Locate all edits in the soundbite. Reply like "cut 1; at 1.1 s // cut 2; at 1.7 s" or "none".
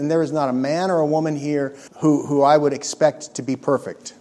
cut 1; at 1.9 s